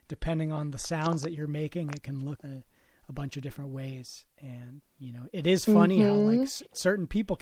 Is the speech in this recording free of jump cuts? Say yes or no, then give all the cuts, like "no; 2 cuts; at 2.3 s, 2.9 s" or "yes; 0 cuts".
no; 2 cuts; at 2.4 s, 4.8 s